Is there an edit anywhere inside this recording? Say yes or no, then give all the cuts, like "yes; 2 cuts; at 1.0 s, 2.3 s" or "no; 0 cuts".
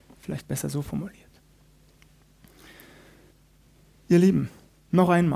no; 0 cuts